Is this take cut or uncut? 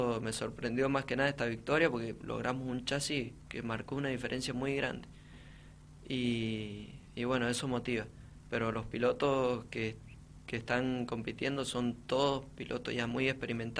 uncut